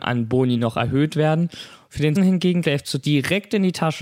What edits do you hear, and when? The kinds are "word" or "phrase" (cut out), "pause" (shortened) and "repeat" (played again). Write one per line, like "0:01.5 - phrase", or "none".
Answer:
0:02.2 - word
0:02.6 - word
0:03.0 - word